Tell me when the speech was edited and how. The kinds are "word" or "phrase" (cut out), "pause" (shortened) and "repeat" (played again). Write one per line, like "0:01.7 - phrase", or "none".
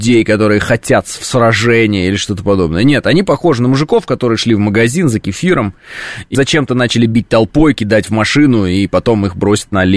0:06.3 - word